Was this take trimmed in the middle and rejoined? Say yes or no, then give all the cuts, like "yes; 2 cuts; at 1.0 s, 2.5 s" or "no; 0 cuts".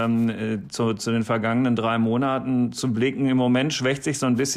no; 0 cuts